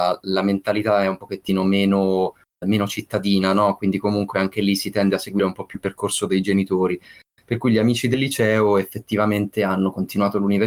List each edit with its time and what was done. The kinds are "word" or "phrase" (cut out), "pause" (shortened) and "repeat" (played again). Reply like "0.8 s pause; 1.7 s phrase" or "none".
2.6 s word